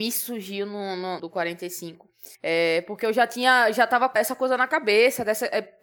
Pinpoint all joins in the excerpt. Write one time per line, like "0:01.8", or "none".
0:01.2
0:02.3
0:04.2